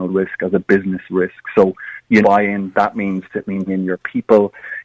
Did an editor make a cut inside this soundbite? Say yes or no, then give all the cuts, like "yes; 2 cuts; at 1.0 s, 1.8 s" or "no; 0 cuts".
yes; 4 cuts; at 2.2 s, 2.9 s, 3.3 s, 3.7 s